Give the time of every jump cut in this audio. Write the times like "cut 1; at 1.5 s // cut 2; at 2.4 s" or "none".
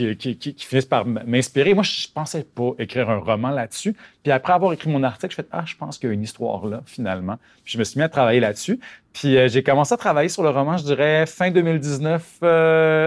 none